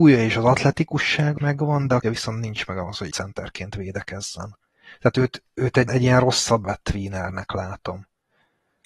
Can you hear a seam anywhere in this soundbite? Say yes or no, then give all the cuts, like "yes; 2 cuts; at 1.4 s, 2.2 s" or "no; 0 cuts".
yes; 6 cuts; at 1.4 s, 2.0 s, 3.1 s, 5.5 s, 5.9 s, 6.6 s